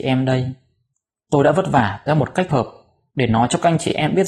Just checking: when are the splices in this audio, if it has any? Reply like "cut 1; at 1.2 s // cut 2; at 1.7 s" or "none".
cut 1; at 2.1 s // cut 2; at 2.5 s